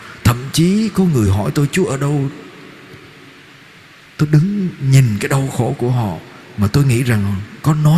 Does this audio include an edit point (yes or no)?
no